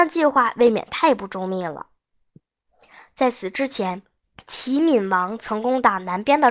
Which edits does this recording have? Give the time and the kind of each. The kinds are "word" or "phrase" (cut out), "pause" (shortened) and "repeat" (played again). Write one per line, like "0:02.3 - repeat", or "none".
0:02.4 - pause
0:04.2 - pause